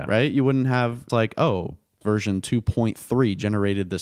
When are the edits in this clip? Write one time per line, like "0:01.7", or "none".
0:01.1
0:02.0